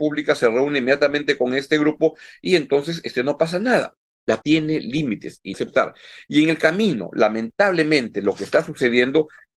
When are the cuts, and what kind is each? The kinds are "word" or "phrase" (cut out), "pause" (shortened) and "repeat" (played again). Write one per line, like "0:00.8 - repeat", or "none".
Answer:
0:04.4 - word
0:05.5 - phrase